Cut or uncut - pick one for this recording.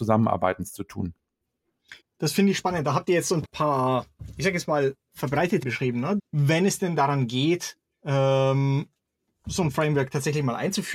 cut